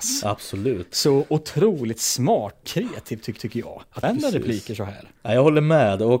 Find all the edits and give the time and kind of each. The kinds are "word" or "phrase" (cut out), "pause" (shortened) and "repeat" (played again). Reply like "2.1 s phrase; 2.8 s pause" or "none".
2.6 s word; 3.4 s repeat; 4.0 s word; 5.2 s pause